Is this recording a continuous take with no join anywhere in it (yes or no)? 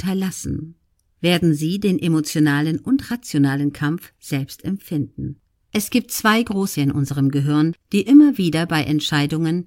no